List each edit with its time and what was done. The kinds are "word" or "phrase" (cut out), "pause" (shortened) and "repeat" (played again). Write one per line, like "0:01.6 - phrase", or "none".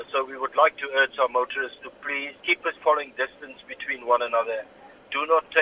0:02.4 - pause
0:02.8 - word

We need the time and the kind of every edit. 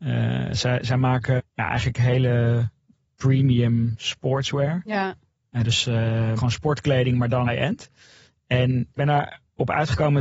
0:01.4 - word
0:03.0 - word
0:06.4 - word
0:07.5 - word
0:09.0 - word

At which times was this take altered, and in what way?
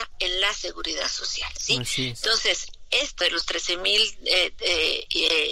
0:03.2 - word

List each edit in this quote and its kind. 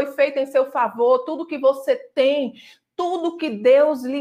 none

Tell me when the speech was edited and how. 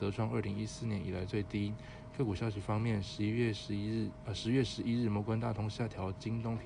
none

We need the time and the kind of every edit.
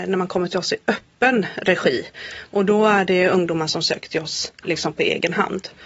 none

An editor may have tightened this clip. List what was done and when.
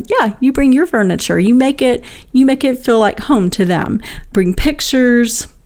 none

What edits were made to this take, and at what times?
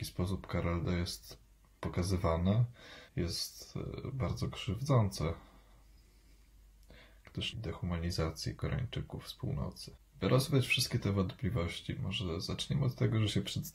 0:03.1 - pause
0:07.5 - phrase

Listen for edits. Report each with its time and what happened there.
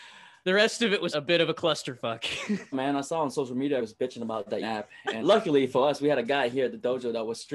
0:01.1 - word
0:02.7 - phrase
0:03.8 - word
0:04.6 - word
0:05.2 - word

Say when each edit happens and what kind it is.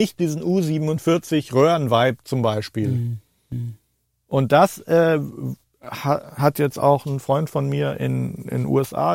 none

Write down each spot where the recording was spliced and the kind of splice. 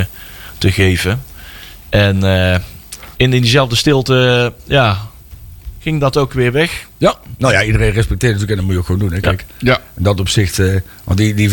none

